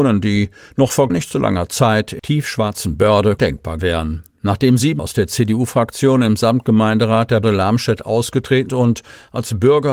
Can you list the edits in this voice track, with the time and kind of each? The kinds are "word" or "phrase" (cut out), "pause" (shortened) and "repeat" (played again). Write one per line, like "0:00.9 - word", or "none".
0:01.1 - word
0:02.2 - word
0:03.4 - word
0:03.8 - word
0:05.0 - word
0:07.4 - word
0:08.7 - word